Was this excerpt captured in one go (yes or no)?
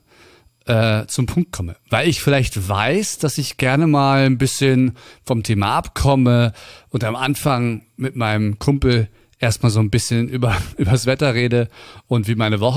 yes